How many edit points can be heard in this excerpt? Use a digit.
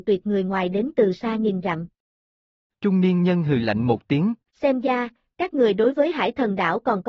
1